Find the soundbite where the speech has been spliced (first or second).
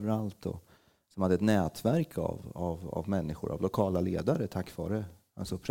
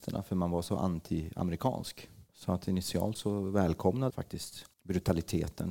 second